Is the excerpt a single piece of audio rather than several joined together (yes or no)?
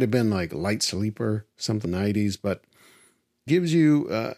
no